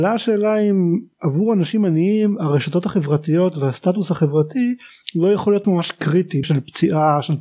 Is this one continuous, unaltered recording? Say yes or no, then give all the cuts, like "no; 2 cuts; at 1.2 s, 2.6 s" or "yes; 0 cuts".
no; 2 cuts; at 5.6 s, 6.4 s